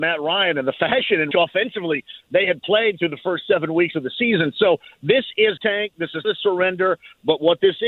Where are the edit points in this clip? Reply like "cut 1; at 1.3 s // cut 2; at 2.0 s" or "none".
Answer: cut 1; at 1.3 s // cut 2; at 5.6 s // cut 3; at 6.2 s